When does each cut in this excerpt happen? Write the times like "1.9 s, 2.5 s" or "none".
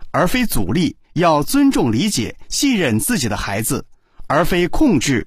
1.0 s